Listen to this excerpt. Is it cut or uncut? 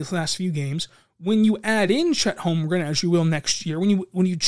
uncut